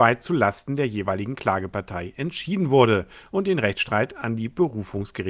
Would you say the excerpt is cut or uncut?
uncut